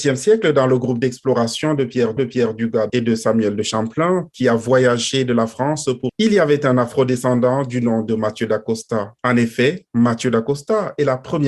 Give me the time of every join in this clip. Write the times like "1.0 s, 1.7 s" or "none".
2.2 s, 2.9 s, 6.1 s, 9.2 s